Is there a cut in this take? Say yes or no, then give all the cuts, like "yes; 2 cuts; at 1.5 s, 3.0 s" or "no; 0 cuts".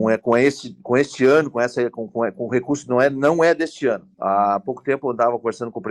no; 0 cuts